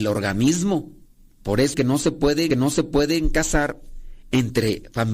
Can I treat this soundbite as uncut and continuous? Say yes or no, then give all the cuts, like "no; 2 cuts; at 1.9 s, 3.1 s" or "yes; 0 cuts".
no; 3 cuts; at 1.0 s, 1.7 s, 2.5 s